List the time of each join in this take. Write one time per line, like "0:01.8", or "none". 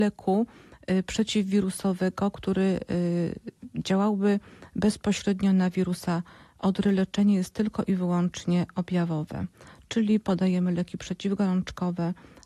none